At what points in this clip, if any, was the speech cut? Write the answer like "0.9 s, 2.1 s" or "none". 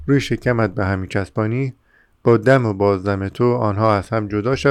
none